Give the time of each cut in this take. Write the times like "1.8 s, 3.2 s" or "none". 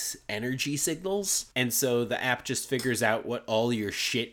1.5 s